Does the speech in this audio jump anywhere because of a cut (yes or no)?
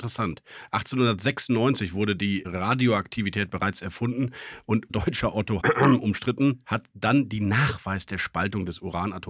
yes